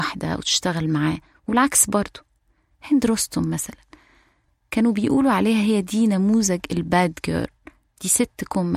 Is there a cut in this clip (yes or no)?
no